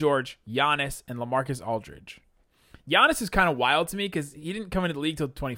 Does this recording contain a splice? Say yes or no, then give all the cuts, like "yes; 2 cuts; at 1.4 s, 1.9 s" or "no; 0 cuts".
no; 0 cuts